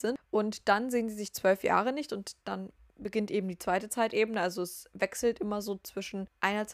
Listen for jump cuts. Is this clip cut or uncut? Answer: uncut